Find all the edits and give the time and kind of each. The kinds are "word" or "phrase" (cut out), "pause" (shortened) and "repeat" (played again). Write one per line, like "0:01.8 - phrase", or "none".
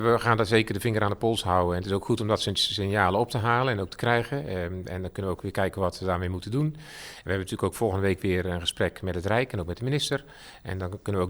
none